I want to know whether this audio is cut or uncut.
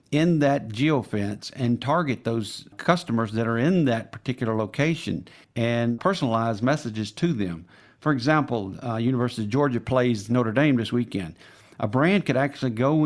uncut